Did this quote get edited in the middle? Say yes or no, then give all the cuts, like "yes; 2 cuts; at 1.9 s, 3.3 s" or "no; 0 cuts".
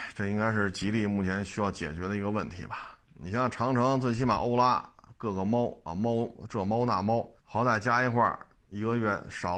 yes; 3 cuts; at 3.0 s, 7.4 s, 8.6 s